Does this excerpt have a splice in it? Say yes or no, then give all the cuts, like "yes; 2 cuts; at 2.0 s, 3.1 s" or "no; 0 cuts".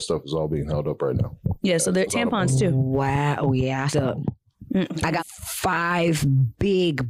yes; 3 cuts; at 2.1 s, 3.9 s, 5.2 s